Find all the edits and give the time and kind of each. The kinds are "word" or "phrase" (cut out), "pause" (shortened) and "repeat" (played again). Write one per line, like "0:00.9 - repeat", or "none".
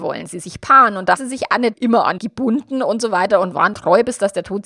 0:01.2 - word
0:01.7 - word
0:02.2 - word
0:03.7 - word